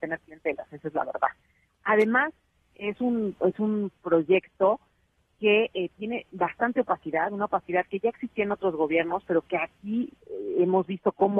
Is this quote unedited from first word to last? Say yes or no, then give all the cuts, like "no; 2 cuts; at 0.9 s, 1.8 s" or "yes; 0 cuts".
yes; 0 cuts